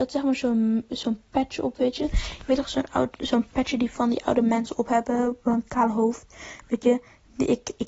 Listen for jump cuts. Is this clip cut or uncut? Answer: uncut